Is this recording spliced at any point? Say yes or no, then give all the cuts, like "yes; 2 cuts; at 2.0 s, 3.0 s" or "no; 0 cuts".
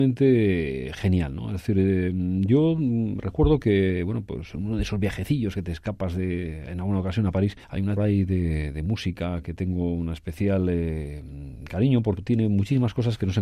yes; 3 cuts; at 7.6 s, 8.0 s, 12.2 s